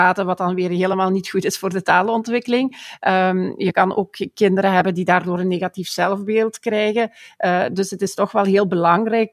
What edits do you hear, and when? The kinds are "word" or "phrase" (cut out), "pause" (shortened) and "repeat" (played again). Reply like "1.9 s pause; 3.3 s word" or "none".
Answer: none